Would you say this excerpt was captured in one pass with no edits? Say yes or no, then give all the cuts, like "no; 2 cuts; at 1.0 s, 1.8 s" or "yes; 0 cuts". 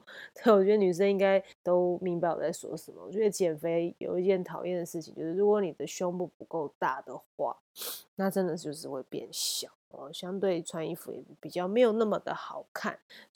no; 2 cuts; at 1.5 s, 9.8 s